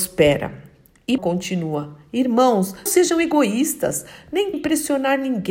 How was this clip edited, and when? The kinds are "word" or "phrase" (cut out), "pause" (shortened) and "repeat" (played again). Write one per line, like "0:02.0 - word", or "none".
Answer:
0:01.2 - word
0:02.9 - word
0:04.5 - word